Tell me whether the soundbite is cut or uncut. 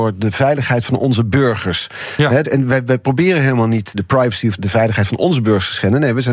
cut